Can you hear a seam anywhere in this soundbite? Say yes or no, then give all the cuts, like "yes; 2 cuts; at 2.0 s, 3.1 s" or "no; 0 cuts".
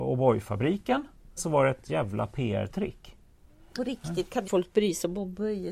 yes; 3 cuts; at 1.4 s, 3.8 s, 4.4 s